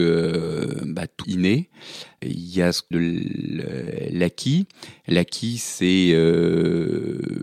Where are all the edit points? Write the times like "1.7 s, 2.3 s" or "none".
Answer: 1.2 s, 2.2 s, 2.9 s